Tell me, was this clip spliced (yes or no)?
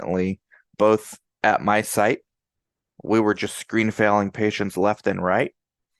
no